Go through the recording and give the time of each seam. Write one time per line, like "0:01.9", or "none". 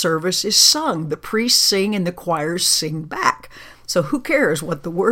none